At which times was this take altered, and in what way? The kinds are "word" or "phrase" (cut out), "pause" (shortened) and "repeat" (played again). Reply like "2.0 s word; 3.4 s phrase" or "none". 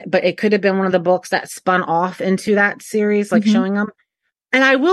none